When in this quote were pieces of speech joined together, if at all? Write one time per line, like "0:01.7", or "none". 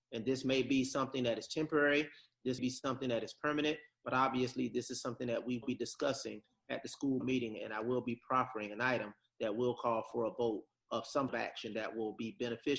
0:02.6
0:05.6
0:07.2
0:11.3